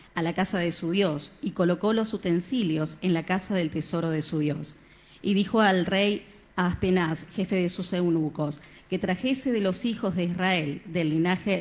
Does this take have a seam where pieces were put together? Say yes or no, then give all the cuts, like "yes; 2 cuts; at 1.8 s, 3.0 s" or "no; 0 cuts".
no; 0 cuts